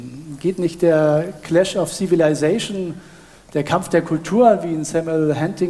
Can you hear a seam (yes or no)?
no